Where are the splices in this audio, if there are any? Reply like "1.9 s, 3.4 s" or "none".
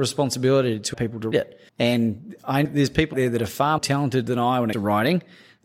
0.9 s, 1.3 s, 1.7 s, 2.6 s, 3.1 s, 3.8 s, 4.7 s